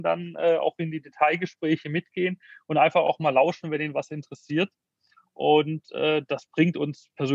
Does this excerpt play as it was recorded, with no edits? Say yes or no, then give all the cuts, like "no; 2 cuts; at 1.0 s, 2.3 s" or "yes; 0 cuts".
yes; 0 cuts